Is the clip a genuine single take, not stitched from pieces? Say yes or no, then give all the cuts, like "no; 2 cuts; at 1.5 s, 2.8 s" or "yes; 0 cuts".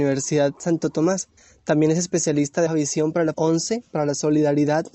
no; 3 cuts; at 1.4 s, 2.7 s, 3.3 s